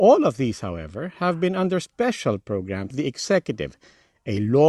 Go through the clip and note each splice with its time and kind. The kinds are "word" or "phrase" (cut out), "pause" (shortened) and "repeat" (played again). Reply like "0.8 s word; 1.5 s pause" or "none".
2.9 s word